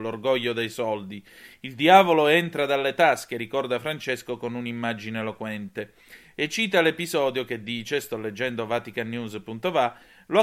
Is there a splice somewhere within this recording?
no; 0 cuts

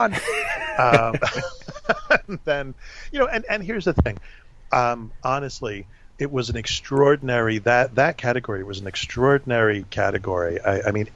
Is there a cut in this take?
no; 0 cuts

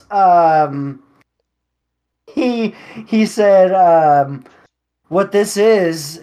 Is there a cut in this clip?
no; 0 cuts

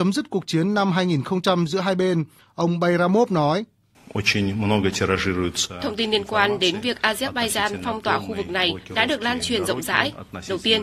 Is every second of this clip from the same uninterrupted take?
yes; 0 cuts

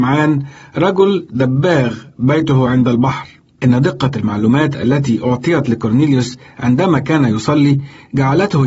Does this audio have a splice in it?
no; 0 cuts

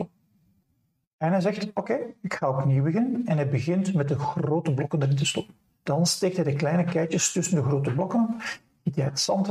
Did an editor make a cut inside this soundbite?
yes; 1 cut; at 5.8 s

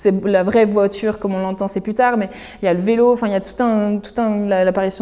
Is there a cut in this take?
no; 0 cuts

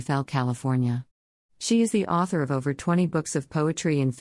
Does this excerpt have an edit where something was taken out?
no; 0 cuts

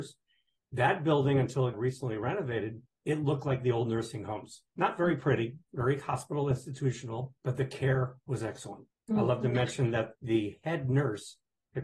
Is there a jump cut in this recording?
yes; 7 cuts; at 1.7 s, 2.9 s, 4.7 s, 5.6 s, 7.4 s, 8.9 s, 10.2 s

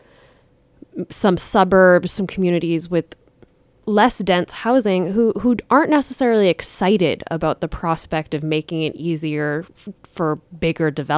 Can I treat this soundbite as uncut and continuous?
yes; 0 cuts

